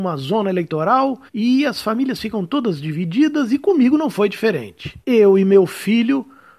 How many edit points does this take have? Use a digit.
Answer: 2